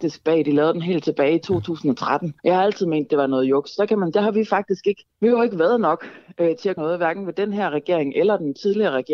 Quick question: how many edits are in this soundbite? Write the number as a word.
four